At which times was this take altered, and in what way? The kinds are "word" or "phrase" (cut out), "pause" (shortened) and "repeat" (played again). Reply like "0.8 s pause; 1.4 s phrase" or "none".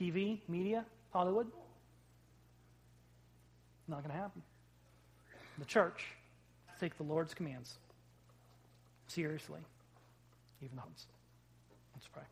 1.1 s word; 6.7 s word; 10.8 s word